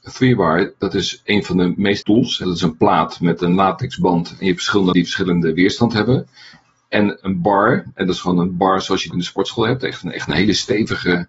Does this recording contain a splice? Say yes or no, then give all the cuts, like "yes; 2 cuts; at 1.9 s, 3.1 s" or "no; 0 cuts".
yes; 5 cuts; at 2.0 s, 2.4 s, 4.9 s, 7.2 s, 9.1 s